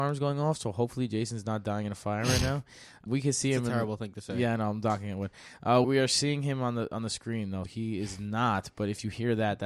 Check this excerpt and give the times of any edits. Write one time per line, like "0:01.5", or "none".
0:03.1
0:05.8
0:07.7